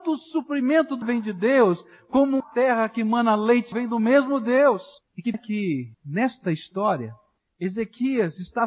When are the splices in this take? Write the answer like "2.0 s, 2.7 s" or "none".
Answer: 1.0 s, 2.4 s, 3.7 s, 5.0 s, 5.3 s, 5.9 s